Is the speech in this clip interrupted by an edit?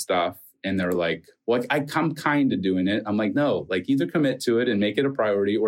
no; 0 cuts

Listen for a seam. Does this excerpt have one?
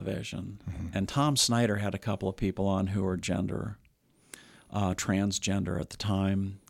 no; 0 cuts

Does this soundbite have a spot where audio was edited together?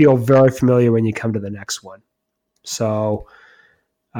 no; 0 cuts

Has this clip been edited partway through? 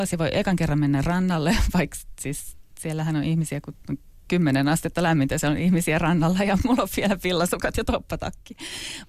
no; 0 cuts

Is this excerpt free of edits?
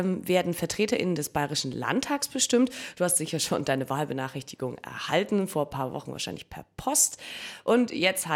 yes; 0 cuts

